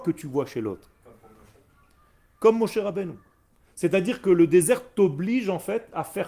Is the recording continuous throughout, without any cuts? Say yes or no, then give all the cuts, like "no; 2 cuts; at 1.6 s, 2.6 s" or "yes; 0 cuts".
yes; 0 cuts